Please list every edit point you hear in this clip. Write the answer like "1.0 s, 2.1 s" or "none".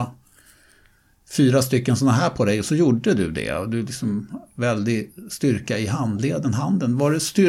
none